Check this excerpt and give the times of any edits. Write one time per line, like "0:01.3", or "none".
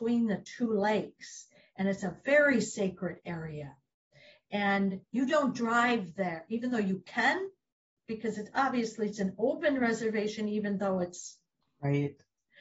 none

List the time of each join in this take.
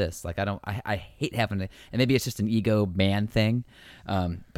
none

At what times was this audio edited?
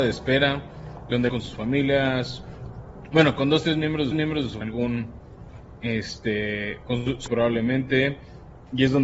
0:01.3
0:04.1
0:04.6
0:07.3

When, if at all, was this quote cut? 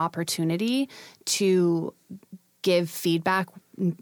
none

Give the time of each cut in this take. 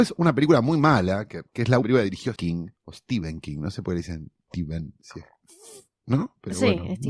0:01.5
0:01.8
0:02.4
0:02.8
0:04.4

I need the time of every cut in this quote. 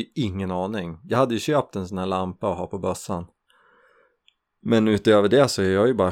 none

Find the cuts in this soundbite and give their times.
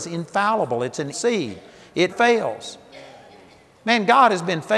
0:01.1
0:02.1

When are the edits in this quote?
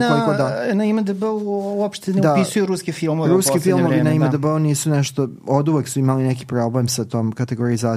none

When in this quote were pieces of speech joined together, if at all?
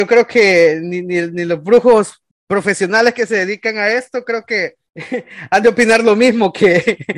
0:02.3
0:04.9

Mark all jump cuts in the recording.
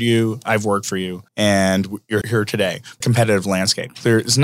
0:01.3
0:02.2
0:03.0

